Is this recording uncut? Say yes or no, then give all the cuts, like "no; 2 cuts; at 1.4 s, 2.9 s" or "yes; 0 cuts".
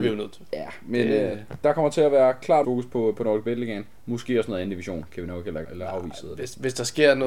no; 2 cuts; at 2.6 s, 5.6 s